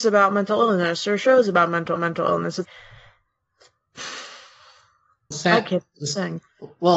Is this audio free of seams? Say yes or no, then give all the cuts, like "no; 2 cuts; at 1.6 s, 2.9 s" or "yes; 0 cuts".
no; 3 cuts; at 2.0 s, 2.6 s, 5.3 s